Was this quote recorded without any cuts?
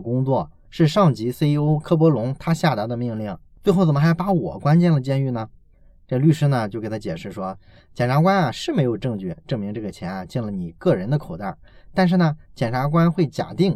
yes; 0 cuts

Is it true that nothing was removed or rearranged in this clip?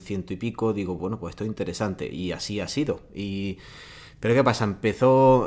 yes; 0 cuts

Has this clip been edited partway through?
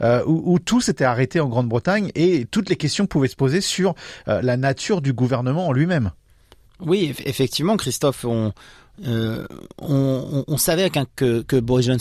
no; 0 cuts

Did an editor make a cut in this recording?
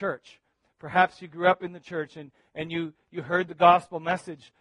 no; 0 cuts

